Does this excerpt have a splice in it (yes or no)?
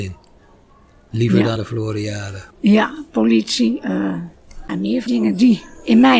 yes